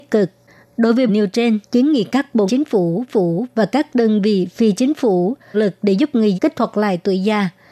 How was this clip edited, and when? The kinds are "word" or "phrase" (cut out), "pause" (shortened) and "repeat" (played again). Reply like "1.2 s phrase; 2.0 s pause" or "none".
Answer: 1.1 s phrase; 1.6 s pause; 2.5 s word; 3.1 s repeat; 5.5 s phrase; 6.3 s word